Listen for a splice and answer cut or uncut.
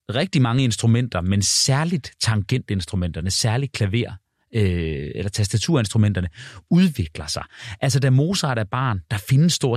uncut